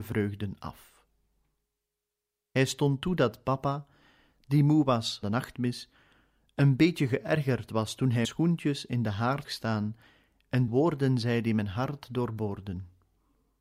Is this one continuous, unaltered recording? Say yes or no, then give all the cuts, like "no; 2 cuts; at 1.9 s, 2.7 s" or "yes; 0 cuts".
no; 4 cuts; at 5.2 s, 8.2 s, 9.4 s, 10.7 s